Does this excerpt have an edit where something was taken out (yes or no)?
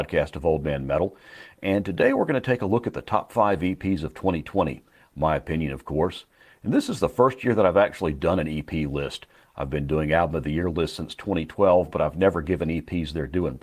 no